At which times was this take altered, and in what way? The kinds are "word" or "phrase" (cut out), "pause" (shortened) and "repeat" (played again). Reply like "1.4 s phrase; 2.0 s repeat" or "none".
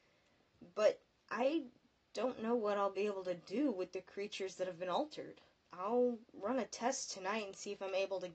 5.5 s pause